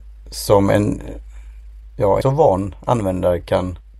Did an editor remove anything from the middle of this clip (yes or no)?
yes